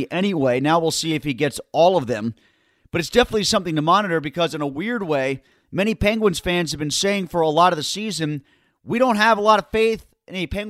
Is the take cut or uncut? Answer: uncut